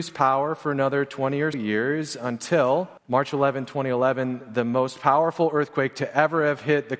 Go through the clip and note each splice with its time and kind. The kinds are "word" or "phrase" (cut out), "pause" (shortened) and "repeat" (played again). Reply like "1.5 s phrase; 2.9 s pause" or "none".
1.5 s word; 3.0 s pause